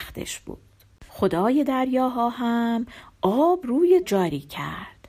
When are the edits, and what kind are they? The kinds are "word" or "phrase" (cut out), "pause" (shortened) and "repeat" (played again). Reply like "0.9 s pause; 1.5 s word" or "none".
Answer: 1.1 s pause; 3.6 s word; 4.0 s word

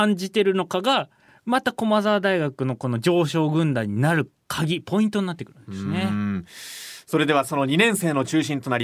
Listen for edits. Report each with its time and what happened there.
none

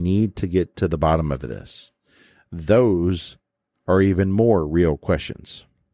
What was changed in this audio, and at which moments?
none

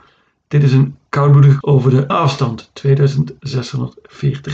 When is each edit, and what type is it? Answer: 1.6 s word; 2.1 s word

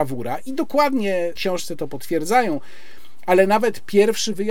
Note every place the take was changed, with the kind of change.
1.4 s phrase

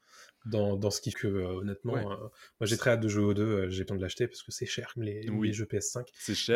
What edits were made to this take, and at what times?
1.1 s word; 2.8 s word; 3.9 s phrase; 4.9 s word

